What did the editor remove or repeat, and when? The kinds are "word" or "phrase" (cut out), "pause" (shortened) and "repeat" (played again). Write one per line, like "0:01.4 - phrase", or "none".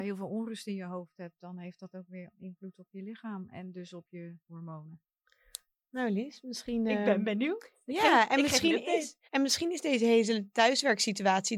0:04.4 - pause
0:09.3 - pause